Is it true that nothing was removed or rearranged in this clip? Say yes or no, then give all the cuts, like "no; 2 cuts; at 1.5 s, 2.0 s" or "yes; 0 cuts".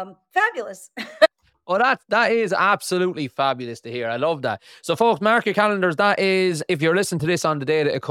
yes; 0 cuts